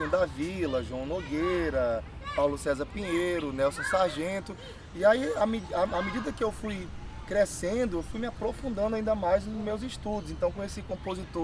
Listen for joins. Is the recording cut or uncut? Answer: uncut